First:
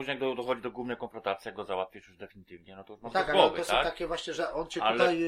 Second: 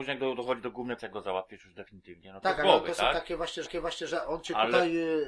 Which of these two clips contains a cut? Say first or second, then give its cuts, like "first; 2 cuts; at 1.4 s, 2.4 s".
second; 3 cuts; at 1.0 s, 2.4 s, 3.7 s